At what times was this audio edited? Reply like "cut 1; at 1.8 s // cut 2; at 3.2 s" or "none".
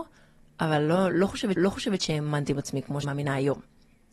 cut 1; at 1.6 s // cut 2; at 3.0 s